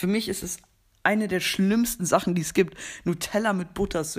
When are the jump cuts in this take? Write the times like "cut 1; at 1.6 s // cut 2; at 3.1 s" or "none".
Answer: none